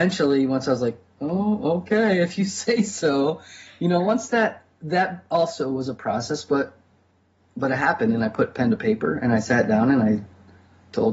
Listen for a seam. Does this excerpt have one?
yes; 1 cut; at 4.7 s

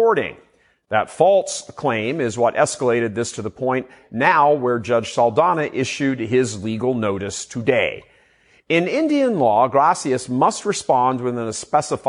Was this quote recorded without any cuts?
yes; 0 cuts

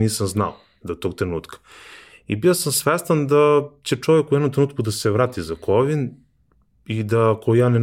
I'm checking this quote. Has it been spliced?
no; 0 cuts

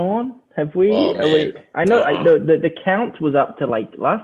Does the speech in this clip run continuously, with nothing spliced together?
yes; 0 cuts

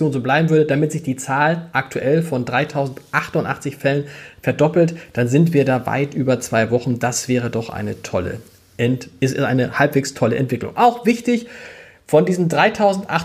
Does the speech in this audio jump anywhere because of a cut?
no; 0 cuts

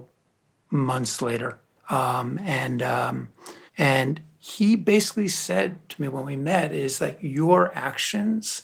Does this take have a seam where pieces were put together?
yes; 1 cut; at 3.7 s

